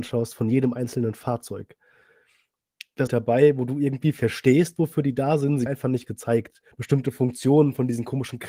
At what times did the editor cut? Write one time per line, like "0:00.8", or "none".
0:03.1
0:05.7
0:06.7